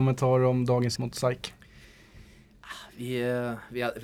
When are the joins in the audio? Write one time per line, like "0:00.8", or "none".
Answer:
0:01.0